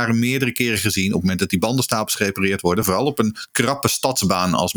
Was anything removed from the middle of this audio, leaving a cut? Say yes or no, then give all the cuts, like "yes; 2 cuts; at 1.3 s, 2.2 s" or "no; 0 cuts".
no; 0 cuts